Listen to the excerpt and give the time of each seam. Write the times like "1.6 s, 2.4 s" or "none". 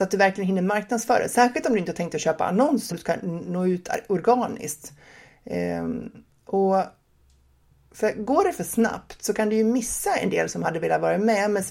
2.9 s